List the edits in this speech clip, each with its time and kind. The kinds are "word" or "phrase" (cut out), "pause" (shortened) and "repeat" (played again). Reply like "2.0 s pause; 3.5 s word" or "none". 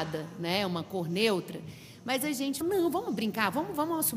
2.6 s word